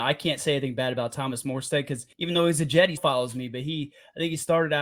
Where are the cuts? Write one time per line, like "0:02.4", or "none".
0:02.1
0:03.0